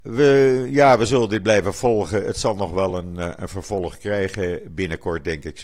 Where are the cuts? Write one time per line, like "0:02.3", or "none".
none